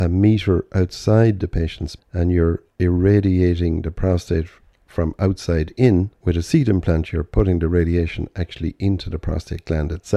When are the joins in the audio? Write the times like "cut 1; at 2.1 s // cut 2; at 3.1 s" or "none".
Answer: cut 1; at 2.0 s // cut 2; at 2.7 s // cut 3; at 4.9 s // cut 4; at 6.1 s